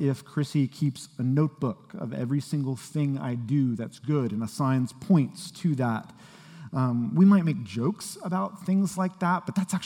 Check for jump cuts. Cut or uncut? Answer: uncut